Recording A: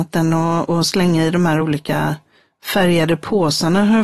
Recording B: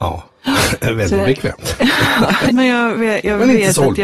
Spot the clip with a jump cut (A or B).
B